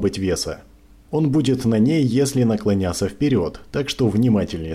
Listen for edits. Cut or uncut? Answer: uncut